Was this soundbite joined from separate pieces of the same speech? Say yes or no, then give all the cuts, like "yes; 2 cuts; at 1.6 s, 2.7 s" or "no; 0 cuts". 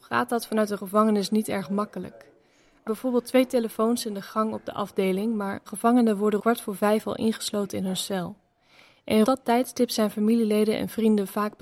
yes; 4 cuts; at 2.9 s, 5.7 s, 6.4 s, 9.2 s